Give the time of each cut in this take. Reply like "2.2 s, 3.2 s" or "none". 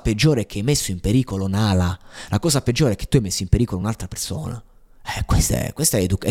none